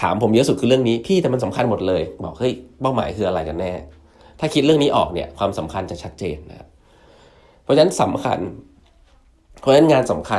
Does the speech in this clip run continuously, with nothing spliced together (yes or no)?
yes